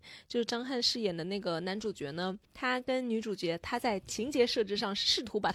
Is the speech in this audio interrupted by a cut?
yes; 1 cut; at 2.4 s

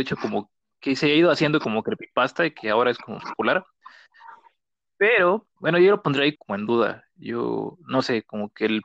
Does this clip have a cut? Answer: yes; 3 cuts; at 3.2 s, 5.6 s, 6.4 s

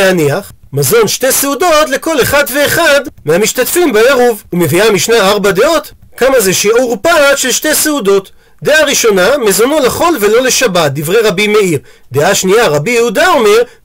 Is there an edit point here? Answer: no; 0 cuts

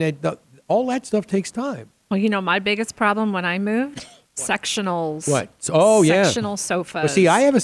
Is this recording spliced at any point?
yes; 1 cut; at 4.3 s

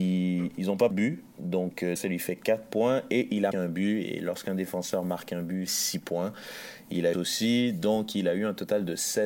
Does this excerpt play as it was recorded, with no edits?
no; 6 cuts; at 0.9 s, 1.3 s, 2.0 s, 3.5 s, 5.7 s, 7.1 s

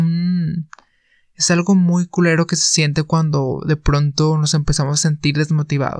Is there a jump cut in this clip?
no; 0 cuts

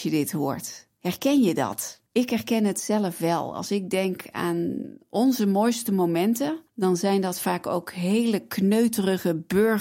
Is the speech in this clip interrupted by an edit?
yes; 2 cuts; at 2.1 s, 6.7 s

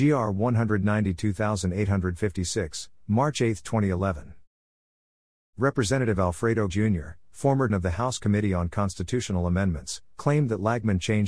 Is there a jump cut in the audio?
yes; 2 cuts; at 6.7 s, 7.7 s

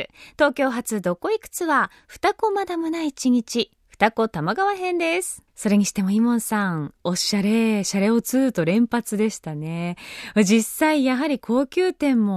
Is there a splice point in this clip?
yes; 1 cut; at 5.5 s

